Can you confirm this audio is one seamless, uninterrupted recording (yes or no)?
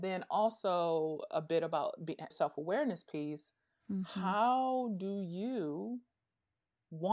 no